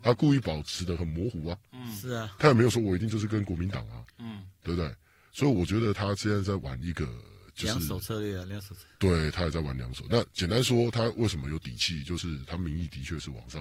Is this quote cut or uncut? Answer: uncut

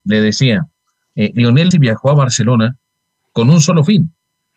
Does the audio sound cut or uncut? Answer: cut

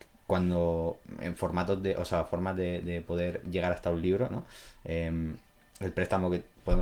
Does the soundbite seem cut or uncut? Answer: uncut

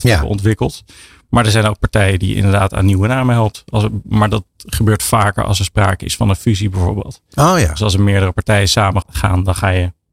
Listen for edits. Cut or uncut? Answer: cut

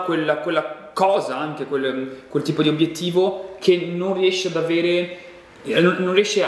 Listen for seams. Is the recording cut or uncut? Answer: uncut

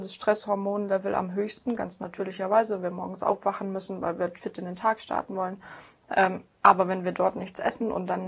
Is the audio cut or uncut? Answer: cut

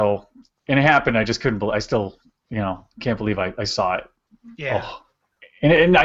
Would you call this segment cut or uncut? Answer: uncut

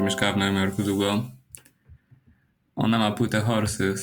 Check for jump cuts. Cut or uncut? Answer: uncut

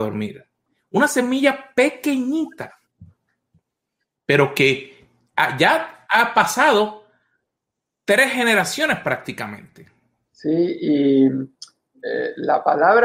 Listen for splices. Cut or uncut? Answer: uncut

